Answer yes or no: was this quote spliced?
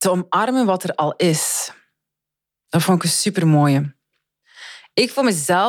no